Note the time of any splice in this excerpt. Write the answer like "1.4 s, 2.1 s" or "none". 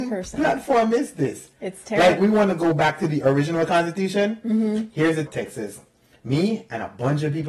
2.2 s, 5.3 s